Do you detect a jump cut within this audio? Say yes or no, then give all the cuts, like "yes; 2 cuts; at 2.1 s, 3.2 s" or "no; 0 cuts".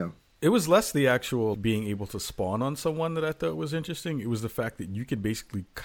yes; 1 cut; at 1.5 s